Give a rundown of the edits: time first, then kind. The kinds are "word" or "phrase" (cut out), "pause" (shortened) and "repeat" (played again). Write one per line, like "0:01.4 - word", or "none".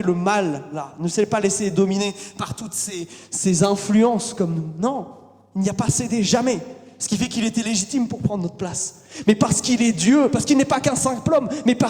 none